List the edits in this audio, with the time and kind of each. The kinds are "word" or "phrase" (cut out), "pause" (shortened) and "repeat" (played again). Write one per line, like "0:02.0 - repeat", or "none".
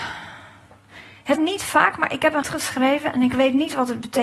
0:01.4 - word
0:02.4 - word